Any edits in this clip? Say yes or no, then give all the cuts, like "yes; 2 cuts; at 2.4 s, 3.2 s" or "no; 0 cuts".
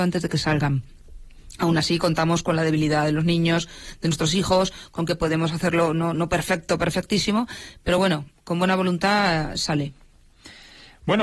no; 0 cuts